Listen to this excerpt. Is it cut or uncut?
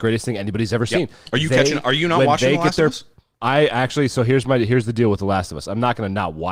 cut